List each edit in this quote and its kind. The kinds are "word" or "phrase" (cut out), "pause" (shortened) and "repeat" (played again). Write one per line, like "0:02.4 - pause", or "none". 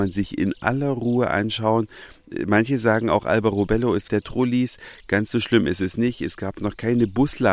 0:04.1 - phrase